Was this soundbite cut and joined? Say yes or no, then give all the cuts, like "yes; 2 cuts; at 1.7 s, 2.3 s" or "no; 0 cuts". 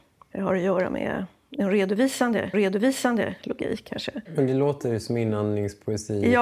yes; 2 cuts; at 2.5 s, 4.3 s